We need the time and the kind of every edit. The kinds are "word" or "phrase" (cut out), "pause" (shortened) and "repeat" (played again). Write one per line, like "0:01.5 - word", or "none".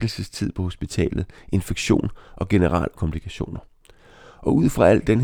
0:02.9 - word